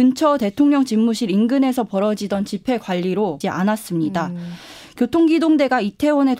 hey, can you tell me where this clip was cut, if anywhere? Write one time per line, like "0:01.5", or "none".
0:03.4